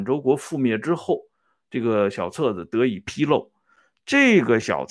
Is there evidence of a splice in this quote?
no; 0 cuts

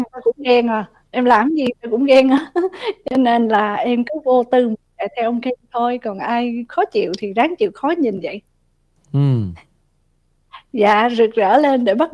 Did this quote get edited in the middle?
no; 0 cuts

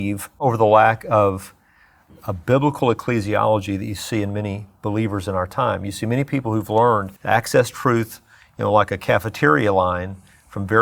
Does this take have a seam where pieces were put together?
yes; 1 cut; at 7.2 s

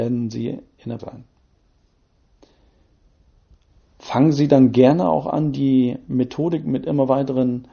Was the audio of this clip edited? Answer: yes; 1 cut; at 1.0 s

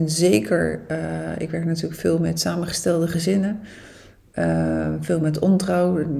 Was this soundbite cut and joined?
no; 0 cuts

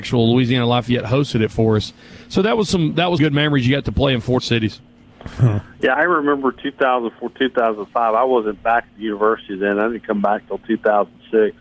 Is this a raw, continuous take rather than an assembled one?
no; 3 cuts; at 3.2 s, 4.4 s, 5.9 s

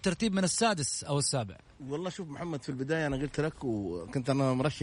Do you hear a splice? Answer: no; 0 cuts

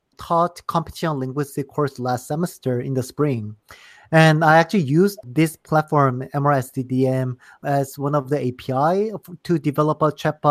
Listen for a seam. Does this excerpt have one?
no; 0 cuts

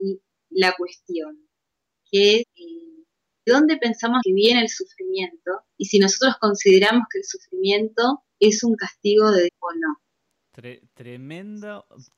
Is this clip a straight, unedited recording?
no; 7 cuts; at 2.4 s, 3.5 s, 4.2 s, 5.7 s, 8.3 s, 9.5 s, 10.1 s

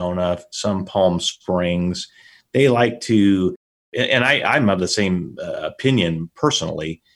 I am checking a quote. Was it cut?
no; 0 cuts

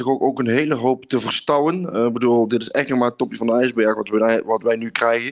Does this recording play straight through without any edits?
yes; 0 cuts

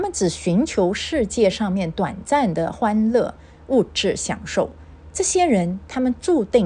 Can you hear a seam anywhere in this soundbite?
no; 0 cuts

